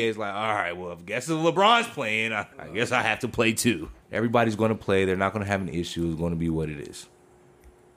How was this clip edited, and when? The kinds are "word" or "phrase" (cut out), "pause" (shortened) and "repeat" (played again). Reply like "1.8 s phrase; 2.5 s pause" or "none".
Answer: 2.5 s pause; 4.0 s pause

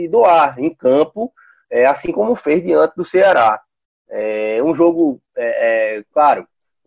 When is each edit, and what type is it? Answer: none

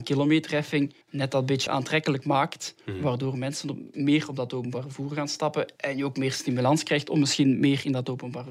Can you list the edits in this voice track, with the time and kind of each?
1.0 s pause; 1.7 s word; 5.8 s pause

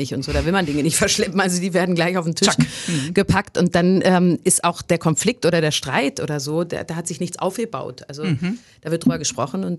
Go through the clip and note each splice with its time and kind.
none

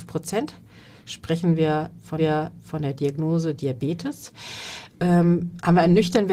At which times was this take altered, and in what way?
2.2 s repeat

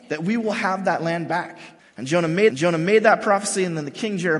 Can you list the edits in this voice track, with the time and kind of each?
1.8 s pause; 2.5 s repeat

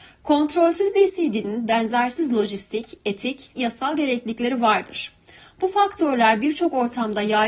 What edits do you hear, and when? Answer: 3.5 s word

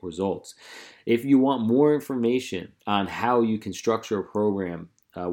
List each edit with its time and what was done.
2.8 s pause

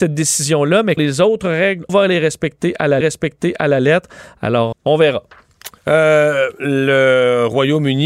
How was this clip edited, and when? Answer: 1.0 s word; 1.9 s word; 3.0 s repeat; 4.7 s word; 5.8 s pause

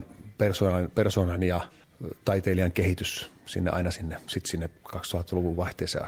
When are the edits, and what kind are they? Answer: none

